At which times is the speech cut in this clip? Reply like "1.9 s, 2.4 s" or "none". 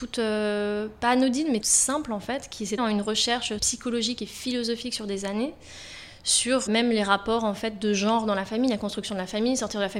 1.6 s, 2.8 s, 3.6 s, 6.7 s